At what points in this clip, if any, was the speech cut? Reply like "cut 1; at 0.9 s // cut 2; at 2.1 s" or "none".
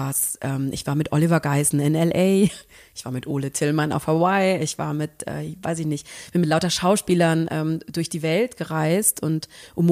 none